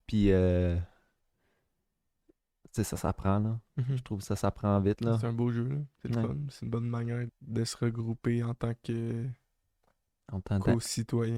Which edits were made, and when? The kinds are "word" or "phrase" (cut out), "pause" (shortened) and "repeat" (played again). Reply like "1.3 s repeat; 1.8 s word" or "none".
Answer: 7.3 s word